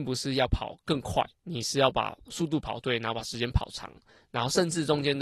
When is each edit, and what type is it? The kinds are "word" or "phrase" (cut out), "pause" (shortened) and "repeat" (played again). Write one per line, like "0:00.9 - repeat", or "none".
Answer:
0:01.4 - pause